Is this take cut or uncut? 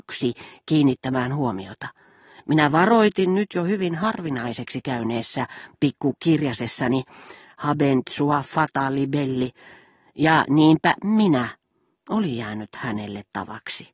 uncut